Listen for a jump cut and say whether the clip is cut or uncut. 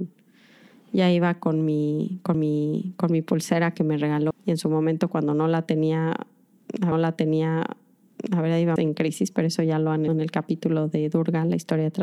cut